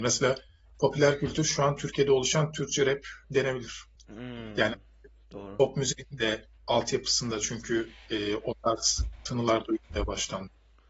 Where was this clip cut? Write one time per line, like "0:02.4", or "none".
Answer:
0:03.2
0:04.0